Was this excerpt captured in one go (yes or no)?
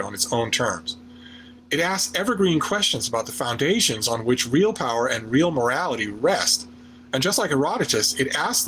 yes